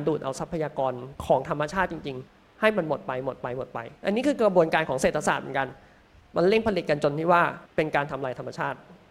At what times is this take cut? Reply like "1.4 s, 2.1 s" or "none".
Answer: 1.2 s, 2.3 s, 4.0 s, 7.7 s

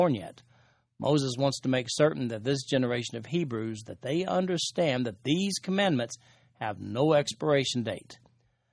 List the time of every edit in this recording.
none

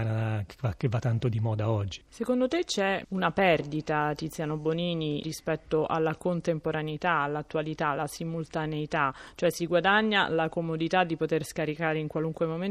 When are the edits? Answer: 5.2 s

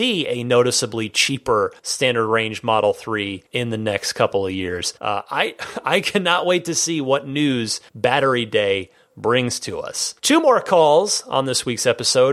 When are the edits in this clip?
1.8 s, 3.5 s, 5.0 s, 7.9 s, 10.2 s

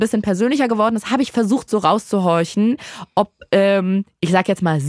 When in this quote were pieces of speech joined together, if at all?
none

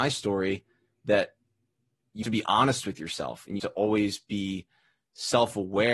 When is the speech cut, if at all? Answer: 2.2 s, 3.6 s

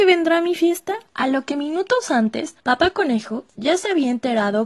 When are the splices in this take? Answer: 1.1 s, 2.6 s

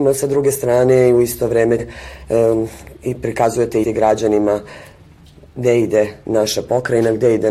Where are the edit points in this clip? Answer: 1.8 s, 3.8 s

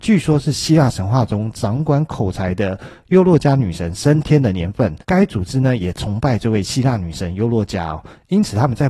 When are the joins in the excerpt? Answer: 5.0 s

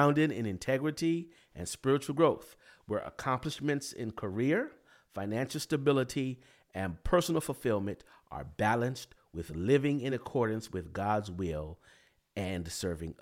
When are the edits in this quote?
none

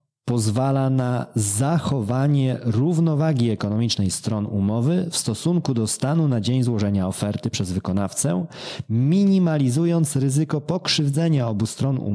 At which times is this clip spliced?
none

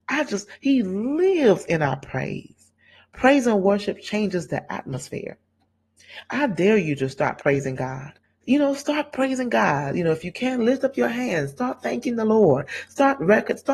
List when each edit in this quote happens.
8.2 s

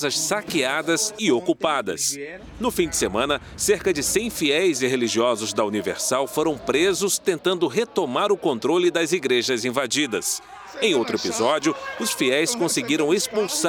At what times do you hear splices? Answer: none

